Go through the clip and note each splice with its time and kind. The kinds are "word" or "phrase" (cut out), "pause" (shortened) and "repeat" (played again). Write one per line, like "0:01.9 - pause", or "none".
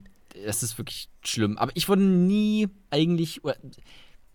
0:01.2 - pause